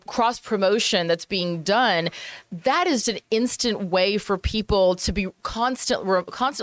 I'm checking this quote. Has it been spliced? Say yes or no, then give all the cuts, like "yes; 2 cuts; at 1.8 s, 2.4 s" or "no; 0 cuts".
yes; 1 cut; at 3.0 s